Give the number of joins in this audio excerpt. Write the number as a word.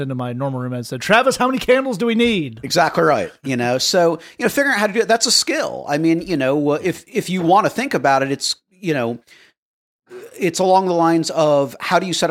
zero